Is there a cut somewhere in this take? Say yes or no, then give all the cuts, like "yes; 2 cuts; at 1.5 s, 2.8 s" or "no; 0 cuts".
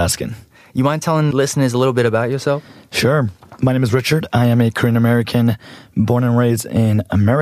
yes; 1 cut; at 1.3 s